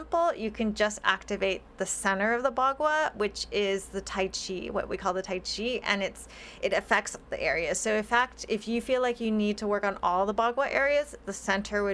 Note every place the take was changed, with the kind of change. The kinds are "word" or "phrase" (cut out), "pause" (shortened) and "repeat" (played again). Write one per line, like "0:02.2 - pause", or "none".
0:07.3 - word